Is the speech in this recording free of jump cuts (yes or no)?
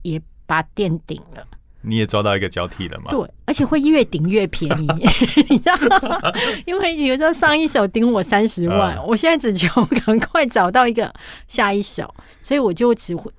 yes